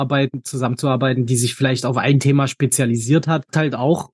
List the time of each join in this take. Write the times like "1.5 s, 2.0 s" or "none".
none

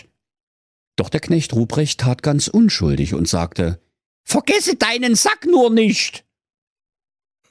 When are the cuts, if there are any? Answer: none

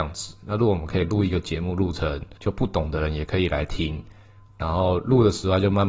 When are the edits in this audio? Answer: 2.4 s

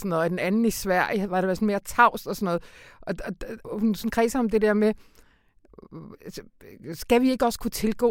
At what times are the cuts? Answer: 3.6 s

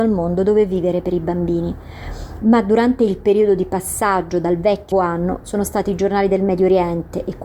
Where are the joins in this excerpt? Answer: 4.9 s

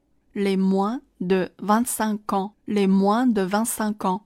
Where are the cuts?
2.6 s

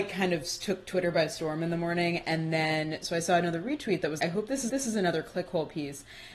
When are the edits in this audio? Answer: 4.2 s, 4.7 s

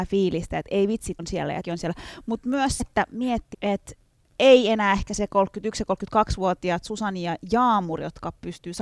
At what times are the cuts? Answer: 1.2 s, 1.6 s, 2.8 s, 3.5 s

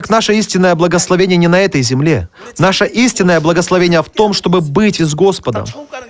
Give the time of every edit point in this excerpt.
5.0 s

